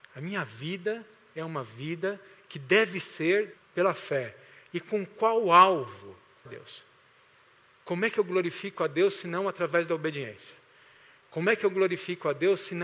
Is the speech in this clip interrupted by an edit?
yes; 2 cuts; at 3.5 s, 6.5 s

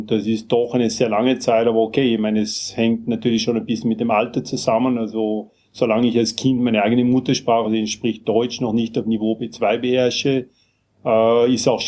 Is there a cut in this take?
no; 0 cuts

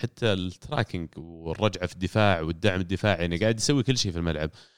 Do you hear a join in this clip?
no; 0 cuts

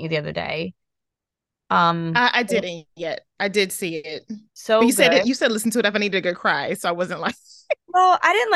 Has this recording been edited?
yes; 2 cuts; at 2.9 s, 4.5 s

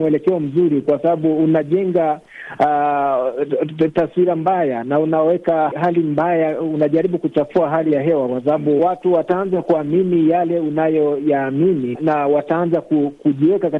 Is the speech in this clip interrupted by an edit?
yes; 3 cuts; at 5.7 s, 8.8 s, 11.9 s

